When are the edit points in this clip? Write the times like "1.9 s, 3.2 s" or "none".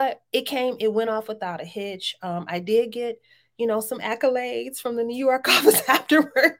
none